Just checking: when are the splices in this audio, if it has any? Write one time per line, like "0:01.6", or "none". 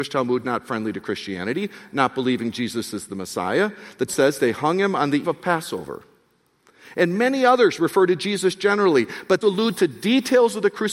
0:04.1
0:05.2
0:09.4